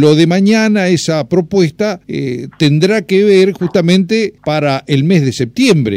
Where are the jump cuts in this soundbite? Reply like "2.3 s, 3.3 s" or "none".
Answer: 2.0 s, 4.4 s